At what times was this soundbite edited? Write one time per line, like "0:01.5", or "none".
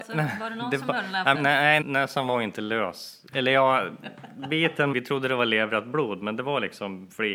0:01.3
0:01.8
0:04.9